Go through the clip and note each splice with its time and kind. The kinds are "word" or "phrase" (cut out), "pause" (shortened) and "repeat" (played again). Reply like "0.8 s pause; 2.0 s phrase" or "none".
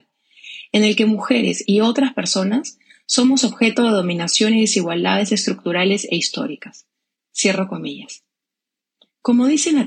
none